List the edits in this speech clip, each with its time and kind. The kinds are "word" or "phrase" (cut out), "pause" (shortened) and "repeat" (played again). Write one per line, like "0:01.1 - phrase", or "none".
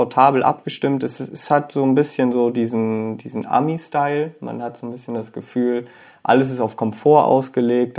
none